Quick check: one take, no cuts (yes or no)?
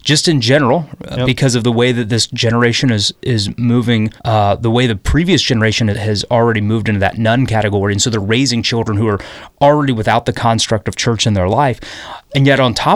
no